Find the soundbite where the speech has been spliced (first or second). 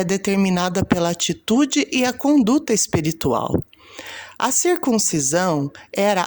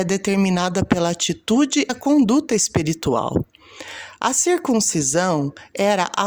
second